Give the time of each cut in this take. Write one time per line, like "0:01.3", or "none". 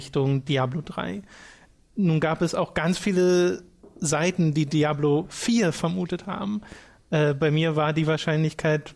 none